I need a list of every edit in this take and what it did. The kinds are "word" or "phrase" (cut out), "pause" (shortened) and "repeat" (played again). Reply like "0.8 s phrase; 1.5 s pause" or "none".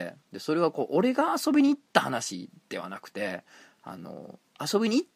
none